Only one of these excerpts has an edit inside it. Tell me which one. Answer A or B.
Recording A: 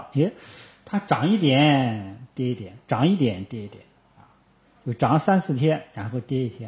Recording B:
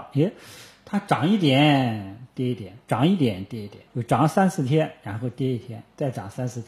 B